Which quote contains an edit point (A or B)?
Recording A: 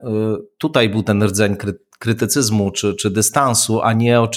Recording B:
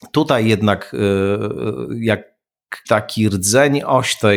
B